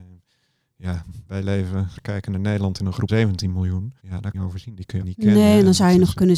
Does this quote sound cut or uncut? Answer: cut